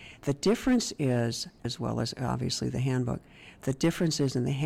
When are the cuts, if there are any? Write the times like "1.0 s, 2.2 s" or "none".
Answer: 1.6 s